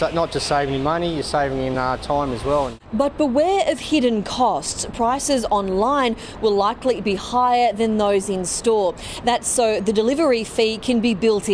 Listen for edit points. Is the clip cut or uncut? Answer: uncut